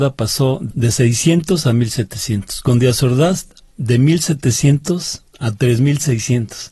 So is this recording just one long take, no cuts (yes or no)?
yes